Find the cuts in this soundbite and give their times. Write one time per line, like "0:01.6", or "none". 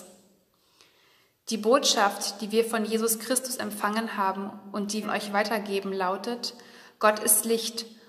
0:05.0